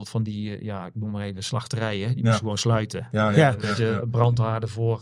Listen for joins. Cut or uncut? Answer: uncut